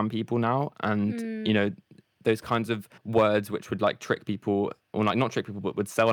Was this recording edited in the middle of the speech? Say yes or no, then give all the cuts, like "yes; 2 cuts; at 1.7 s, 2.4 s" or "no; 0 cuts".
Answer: yes; 1 cut; at 3.0 s